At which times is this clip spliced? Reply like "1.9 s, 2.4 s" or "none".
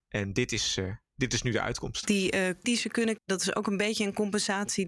2.6 s, 3.2 s